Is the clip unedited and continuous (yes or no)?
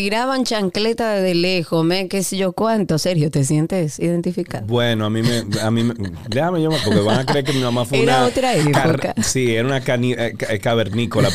no